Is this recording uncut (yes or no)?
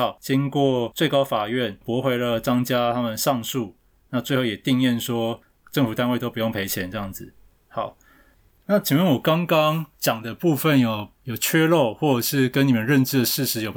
yes